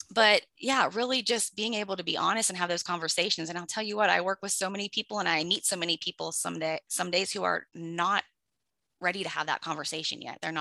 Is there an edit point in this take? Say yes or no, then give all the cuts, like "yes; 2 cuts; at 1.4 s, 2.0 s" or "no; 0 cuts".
yes; 2 cuts; at 6.9 s, 7.7 s